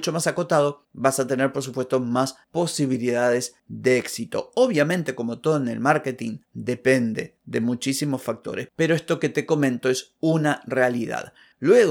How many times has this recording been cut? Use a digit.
0